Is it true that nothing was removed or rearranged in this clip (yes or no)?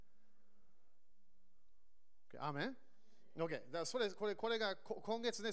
yes